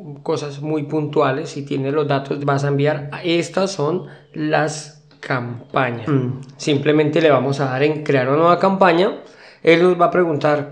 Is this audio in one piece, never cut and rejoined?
no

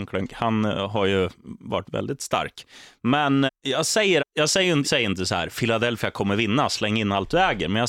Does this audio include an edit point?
yes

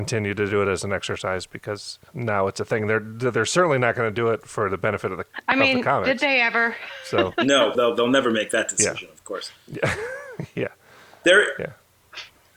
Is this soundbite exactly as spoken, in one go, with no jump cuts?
no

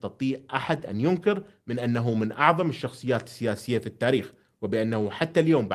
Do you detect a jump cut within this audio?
no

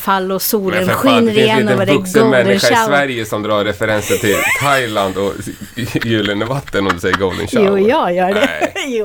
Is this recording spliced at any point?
no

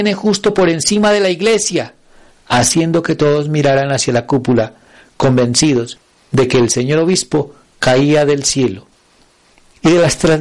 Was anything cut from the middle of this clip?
no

